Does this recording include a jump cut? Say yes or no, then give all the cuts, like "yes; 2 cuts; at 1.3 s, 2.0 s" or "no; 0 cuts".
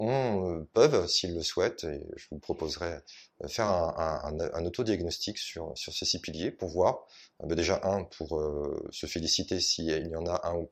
no; 0 cuts